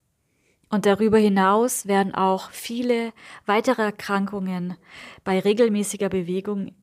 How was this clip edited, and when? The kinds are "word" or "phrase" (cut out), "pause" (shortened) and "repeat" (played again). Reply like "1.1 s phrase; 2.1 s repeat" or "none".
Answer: none